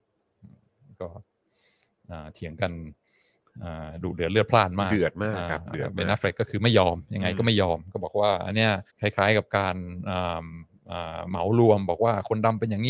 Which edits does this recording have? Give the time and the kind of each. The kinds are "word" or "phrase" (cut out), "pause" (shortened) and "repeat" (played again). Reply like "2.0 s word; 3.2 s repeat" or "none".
8.9 s pause